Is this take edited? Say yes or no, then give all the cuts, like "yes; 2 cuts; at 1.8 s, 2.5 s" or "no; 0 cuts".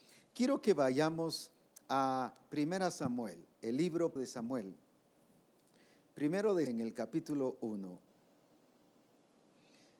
yes; 3 cuts; at 3.5 s, 4.2 s, 6.7 s